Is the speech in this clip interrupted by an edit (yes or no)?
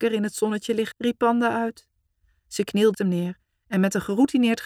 yes